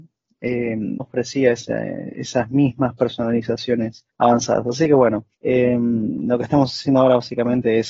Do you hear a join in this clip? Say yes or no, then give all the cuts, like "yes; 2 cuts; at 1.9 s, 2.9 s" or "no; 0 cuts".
yes; 3 cuts; at 1.0 s, 4.1 s, 5.3 s